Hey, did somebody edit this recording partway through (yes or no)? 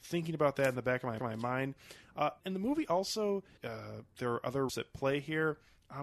yes